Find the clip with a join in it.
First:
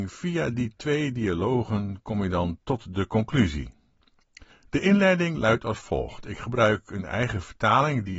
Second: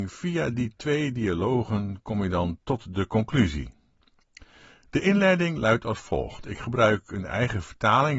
first; 1 cut; at 4.5 s

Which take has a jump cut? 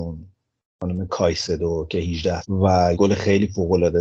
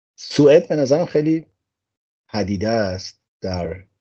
first; 2 cuts; at 2.4 s, 2.9 s

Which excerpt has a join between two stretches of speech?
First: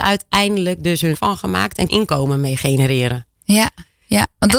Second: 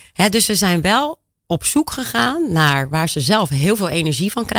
first; 3 cuts; at 1.1 s, 1.9 s, 3.3 s

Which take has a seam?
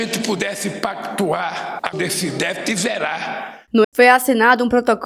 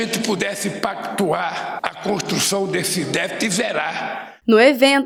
first; 2 cuts; at 1.9 s, 3.8 s

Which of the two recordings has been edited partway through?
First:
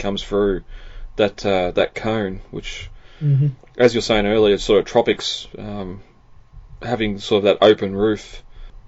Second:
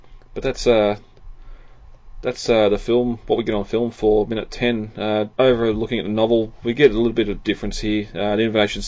second; 1 cut; at 5.3 s

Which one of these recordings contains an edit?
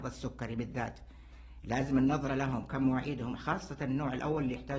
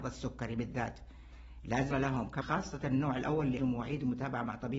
second; 3 cuts; at 1.9 s, 2.4 s, 3.6 s

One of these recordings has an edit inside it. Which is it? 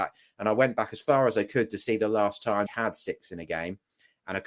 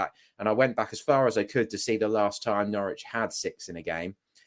first; 1 cut; at 2.7 s

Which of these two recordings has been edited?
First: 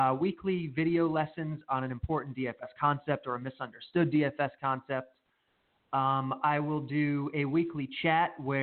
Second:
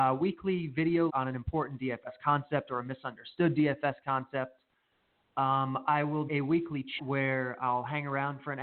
second; 3 cuts; at 1.1 s, 6.3 s, 7.0 s

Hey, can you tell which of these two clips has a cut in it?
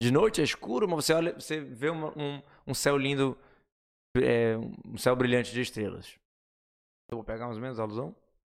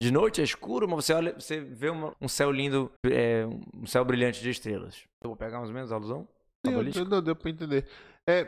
second; 3 cuts; at 2.1 s, 3.0 s, 5.1 s

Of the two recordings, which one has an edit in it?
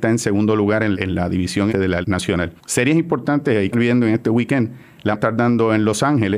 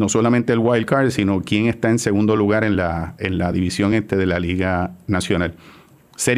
first; 6 cuts; at 0.9 s, 1.7 s, 2.0 s, 2.6 s, 3.7 s, 5.1 s

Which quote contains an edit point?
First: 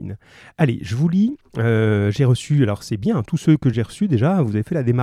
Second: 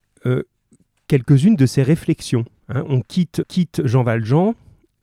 second; 1 cut; at 3.4 s

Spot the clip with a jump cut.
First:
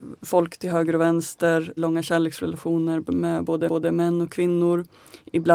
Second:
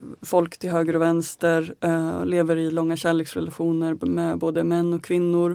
first; 2 cuts; at 1.8 s, 3.7 s

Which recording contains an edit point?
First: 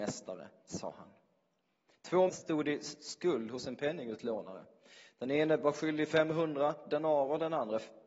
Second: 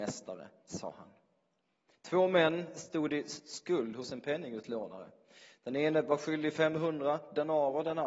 first; 1 cut; at 2.3 s

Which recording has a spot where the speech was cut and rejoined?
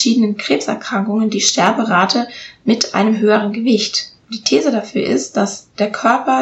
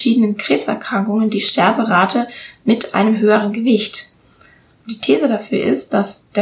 first; 1 cut; at 4.2 s

